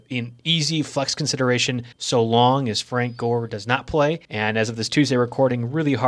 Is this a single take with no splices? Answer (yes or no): no